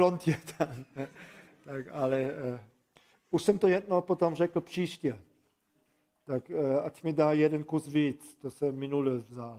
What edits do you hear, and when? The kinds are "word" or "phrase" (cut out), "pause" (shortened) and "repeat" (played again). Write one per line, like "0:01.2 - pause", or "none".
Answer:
none